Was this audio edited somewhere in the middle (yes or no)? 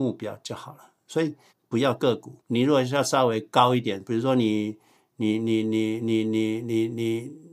yes